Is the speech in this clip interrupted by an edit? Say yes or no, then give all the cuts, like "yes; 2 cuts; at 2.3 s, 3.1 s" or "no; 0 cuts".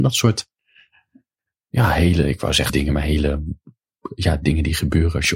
yes; 1 cut; at 2.7 s